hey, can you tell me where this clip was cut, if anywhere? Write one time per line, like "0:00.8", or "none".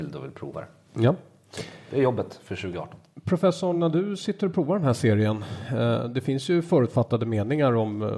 none